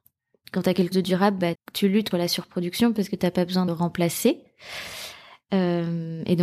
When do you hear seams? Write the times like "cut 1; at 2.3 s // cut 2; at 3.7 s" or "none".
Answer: cut 1; at 0.9 s // cut 2; at 1.5 s // cut 3; at 2.1 s // cut 4; at 3.7 s